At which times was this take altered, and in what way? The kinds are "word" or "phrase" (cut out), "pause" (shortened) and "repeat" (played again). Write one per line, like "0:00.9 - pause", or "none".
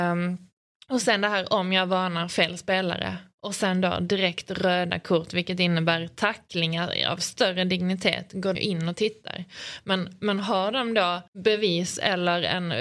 0:08.5 - word
0:11.3 - pause